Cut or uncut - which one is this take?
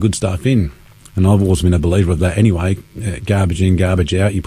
uncut